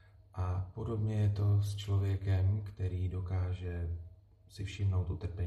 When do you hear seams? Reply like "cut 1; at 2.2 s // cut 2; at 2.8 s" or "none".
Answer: none

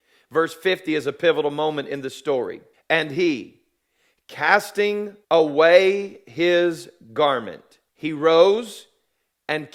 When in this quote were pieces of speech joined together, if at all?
cut 1; at 2.7 s // cut 2; at 5.2 s // cut 3; at 7.9 s

